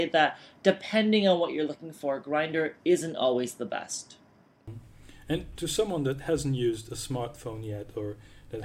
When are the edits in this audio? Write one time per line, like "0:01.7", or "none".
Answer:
none